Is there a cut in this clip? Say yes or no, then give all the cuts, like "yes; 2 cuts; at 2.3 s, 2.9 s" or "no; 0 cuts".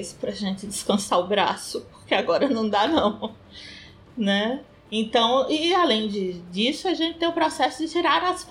no; 0 cuts